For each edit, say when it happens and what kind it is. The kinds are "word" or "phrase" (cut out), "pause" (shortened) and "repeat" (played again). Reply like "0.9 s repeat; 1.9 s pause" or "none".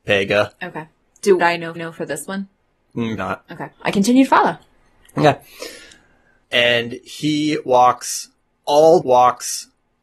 1.4 s word; 1.8 s repeat; 3.2 s word; 3.7 s pause; 9.0 s repeat

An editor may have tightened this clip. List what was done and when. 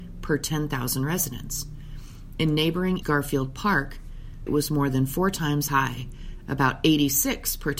3.0 s word; 4.5 s phrase; 5.7 s word

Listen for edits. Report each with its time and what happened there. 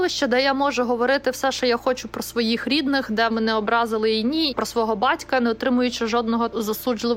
3.3 s word; 4.5 s word

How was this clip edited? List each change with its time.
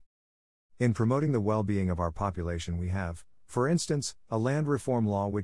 none

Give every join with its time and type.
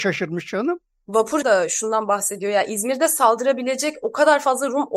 1.4 s phrase

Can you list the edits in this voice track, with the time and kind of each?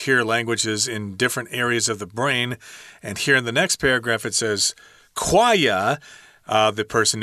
none

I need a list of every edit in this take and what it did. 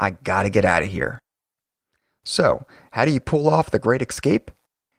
none

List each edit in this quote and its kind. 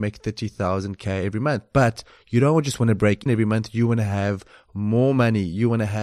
3.3 s word

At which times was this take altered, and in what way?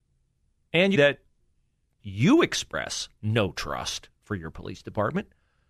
0.9 s phrase; 2.0 s word

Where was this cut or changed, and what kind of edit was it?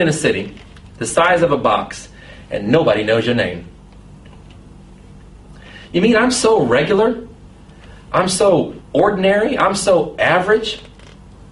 8.8 s pause

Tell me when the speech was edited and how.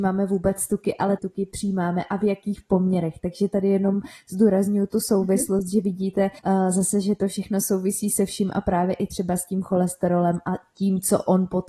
1.2 s phrase; 6.4 s pause

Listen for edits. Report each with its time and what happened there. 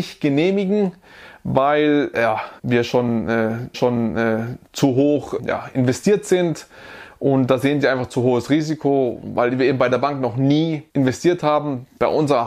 2.6 s pause; 3.7 s repeat; 5.4 s word; 10.9 s pause

